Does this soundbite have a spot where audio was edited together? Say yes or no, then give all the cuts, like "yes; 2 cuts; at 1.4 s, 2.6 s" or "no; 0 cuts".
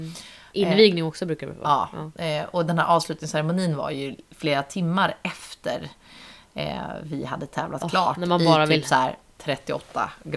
no; 0 cuts